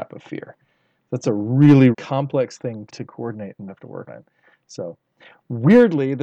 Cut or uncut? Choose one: cut